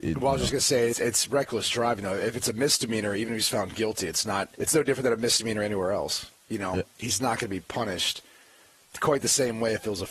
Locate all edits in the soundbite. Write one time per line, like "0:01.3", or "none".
0:00.9
0:04.5